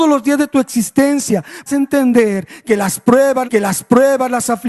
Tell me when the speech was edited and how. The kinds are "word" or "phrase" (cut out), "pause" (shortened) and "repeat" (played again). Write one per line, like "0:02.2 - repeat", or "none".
0:01.7 - word
0:03.4 - repeat